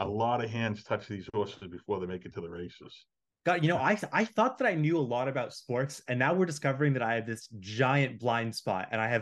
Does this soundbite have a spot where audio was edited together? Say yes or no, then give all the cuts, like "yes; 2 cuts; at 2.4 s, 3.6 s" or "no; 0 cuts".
no; 0 cuts